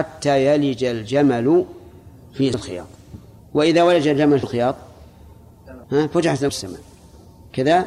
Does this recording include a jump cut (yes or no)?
yes